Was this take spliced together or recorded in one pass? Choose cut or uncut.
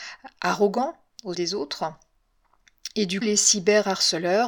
cut